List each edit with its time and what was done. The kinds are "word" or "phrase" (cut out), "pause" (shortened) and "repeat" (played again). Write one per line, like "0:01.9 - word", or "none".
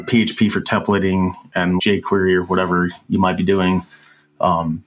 0:01.8 - word

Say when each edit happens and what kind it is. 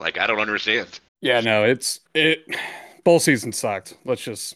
0:01.1 - pause
0:02.1 - pause

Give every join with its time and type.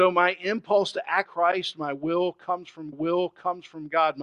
0:01.3 - word
0:02.9 - repeat

